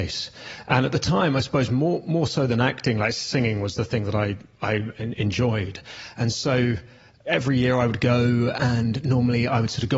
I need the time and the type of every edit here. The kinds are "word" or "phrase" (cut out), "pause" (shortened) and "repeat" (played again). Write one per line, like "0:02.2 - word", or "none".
none